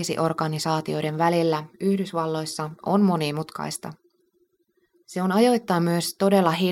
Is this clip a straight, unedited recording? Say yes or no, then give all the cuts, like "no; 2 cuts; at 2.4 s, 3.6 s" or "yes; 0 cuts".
yes; 0 cuts